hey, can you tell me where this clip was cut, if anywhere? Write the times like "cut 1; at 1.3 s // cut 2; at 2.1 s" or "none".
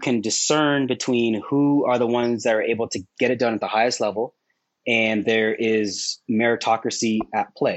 none